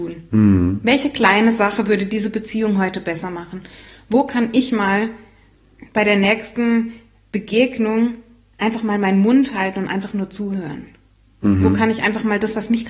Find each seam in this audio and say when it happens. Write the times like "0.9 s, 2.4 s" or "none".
none